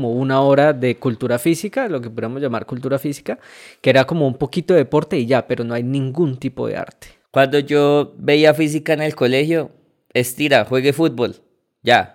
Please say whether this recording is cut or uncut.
uncut